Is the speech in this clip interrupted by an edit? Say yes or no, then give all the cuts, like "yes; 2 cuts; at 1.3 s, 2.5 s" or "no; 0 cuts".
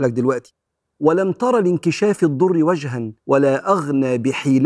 yes; 1 cut; at 3.2 s